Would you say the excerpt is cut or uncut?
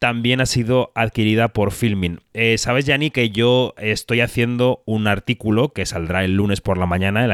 uncut